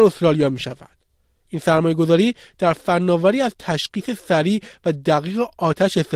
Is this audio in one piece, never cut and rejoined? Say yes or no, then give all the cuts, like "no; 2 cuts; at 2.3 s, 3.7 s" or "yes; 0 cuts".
yes; 0 cuts